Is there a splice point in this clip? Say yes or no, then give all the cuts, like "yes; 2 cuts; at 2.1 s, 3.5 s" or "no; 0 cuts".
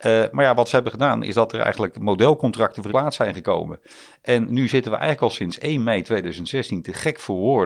yes; 1 cut; at 2.9 s